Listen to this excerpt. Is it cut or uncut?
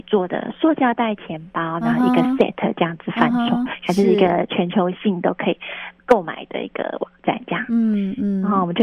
uncut